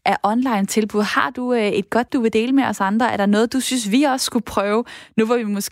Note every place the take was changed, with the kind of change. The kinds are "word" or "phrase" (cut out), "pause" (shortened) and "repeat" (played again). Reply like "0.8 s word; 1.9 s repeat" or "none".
2.1 s word